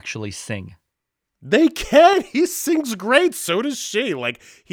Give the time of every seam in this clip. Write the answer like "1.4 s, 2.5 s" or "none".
none